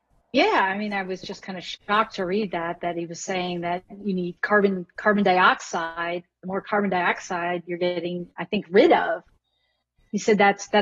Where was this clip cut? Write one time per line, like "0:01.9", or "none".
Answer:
none